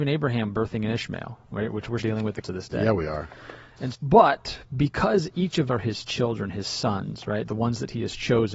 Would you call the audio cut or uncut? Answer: cut